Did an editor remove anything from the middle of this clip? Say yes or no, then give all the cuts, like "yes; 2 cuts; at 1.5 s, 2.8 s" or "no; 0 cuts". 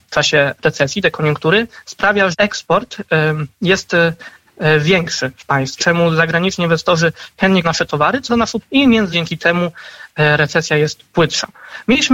yes; 6 cuts; at 2.3 s, 5.8 s, 7.6 s, 8.3 s, 8.6 s, 9.1 s